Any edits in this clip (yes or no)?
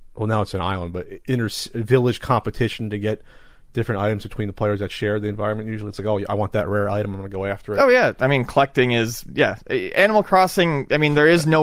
no